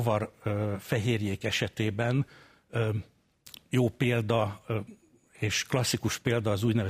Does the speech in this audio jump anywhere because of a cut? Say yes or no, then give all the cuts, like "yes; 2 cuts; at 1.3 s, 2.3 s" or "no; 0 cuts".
no; 0 cuts